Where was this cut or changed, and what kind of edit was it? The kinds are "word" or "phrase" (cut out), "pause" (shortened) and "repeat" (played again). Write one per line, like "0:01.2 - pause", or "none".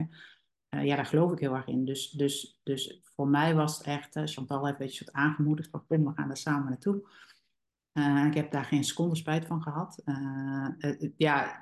0:04.8 - phrase